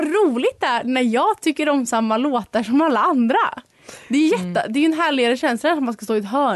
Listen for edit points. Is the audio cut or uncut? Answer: uncut